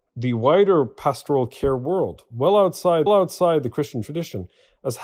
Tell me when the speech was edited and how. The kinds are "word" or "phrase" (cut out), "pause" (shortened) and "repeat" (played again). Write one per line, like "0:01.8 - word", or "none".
0:03.1 - repeat